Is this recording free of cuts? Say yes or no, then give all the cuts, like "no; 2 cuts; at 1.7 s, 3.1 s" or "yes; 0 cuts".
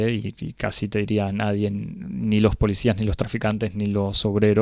yes; 0 cuts